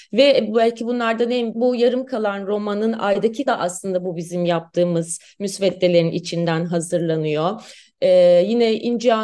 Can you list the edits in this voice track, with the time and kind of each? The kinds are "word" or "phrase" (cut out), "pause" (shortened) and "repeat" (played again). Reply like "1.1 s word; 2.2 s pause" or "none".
1.5 s word; 3.5 s word